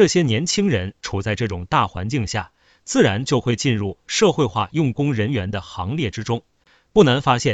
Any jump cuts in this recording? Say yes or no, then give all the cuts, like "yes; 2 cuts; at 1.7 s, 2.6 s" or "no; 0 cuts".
no; 0 cuts